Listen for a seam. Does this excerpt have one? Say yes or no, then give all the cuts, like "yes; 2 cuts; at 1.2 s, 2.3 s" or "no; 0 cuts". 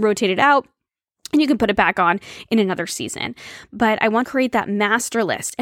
yes; 1 cut; at 4.2 s